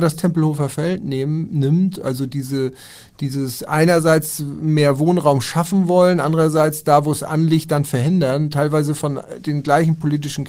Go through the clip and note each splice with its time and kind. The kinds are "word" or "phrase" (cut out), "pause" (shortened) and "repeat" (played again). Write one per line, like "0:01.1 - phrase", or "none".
none